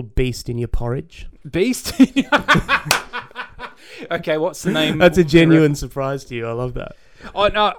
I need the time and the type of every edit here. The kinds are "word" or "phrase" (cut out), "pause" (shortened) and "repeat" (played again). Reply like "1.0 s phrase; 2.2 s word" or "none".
1.4 s pause